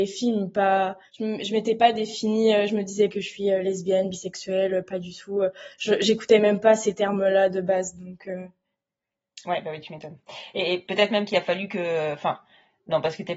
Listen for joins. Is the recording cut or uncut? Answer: cut